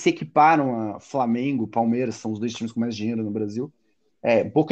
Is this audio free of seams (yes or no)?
yes